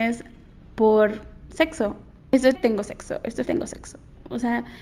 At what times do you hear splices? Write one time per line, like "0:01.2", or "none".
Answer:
0:02.5
0:03.4